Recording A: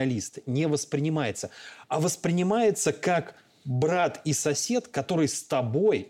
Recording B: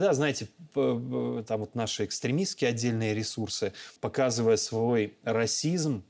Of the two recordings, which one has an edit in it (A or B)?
B